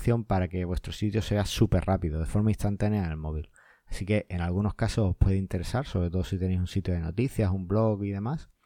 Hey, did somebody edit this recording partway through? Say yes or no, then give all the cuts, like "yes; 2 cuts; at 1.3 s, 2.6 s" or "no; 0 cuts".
no; 0 cuts